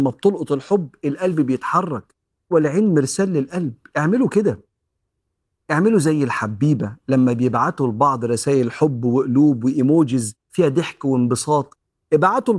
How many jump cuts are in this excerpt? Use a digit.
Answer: 2